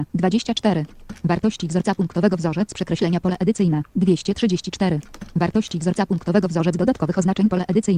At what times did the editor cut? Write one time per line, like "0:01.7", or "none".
none